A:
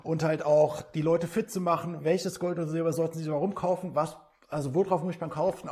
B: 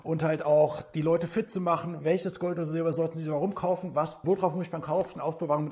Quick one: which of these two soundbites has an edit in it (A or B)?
B